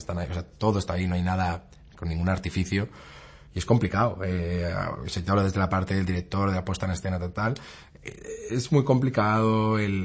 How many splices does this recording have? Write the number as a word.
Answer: zero